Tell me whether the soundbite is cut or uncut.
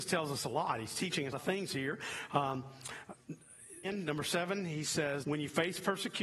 cut